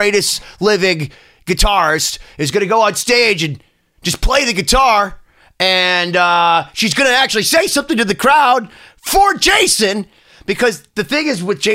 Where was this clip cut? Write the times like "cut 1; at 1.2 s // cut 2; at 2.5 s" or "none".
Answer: none